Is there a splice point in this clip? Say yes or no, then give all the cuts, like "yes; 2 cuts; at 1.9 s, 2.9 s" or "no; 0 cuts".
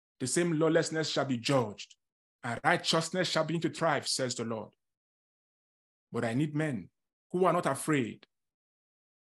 no; 0 cuts